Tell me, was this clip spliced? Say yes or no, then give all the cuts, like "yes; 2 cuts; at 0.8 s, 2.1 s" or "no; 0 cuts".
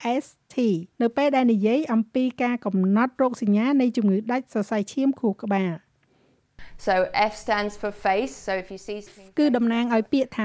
yes; 2 cuts; at 0.9 s, 9.1 s